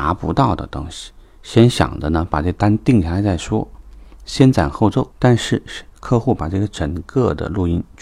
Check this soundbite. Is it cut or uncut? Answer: cut